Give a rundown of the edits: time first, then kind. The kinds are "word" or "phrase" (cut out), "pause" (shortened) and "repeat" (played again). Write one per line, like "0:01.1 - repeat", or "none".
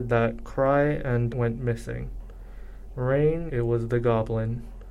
0:01.3 - word
0:03.5 - phrase